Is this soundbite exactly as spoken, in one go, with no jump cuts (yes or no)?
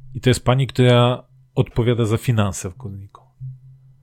yes